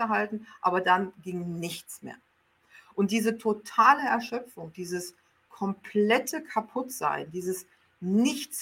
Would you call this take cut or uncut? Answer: uncut